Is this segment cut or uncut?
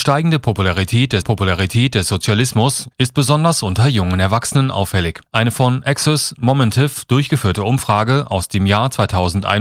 cut